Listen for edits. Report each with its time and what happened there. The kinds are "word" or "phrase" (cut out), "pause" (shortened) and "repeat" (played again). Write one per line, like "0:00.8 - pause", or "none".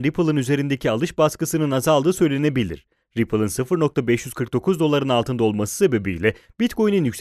none